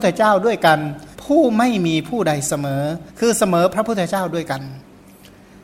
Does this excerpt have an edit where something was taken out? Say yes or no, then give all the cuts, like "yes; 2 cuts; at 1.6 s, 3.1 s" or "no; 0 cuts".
yes; 2 cuts; at 1.1 s, 3.1 s